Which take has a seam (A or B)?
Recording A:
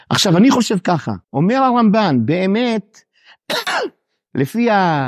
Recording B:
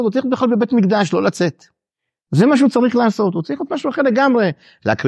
A